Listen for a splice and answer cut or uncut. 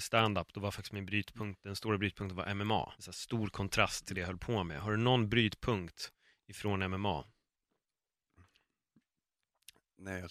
cut